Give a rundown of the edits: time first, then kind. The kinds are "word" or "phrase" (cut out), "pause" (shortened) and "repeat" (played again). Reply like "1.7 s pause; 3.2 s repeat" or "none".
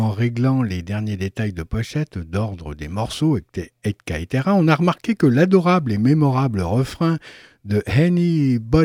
none